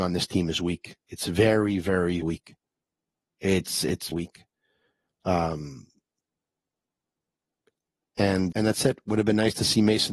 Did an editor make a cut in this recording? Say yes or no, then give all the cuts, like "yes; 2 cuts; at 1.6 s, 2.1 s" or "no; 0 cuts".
yes; 3 cuts; at 2.2 s, 4.1 s, 8.5 s